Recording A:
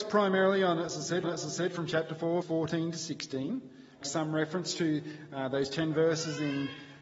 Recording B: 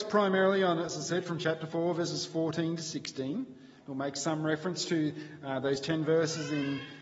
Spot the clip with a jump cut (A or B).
A